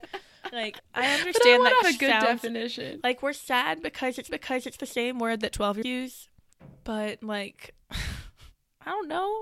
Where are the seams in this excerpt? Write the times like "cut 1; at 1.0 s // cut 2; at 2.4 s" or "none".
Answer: cut 1; at 1.8 s // cut 2; at 4.3 s // cut 3; at 5.8 s // cut 4; at 7.8 s